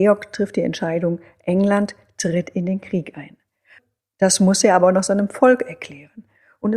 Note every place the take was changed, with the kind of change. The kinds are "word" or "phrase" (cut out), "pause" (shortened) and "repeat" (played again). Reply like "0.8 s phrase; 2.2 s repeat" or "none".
none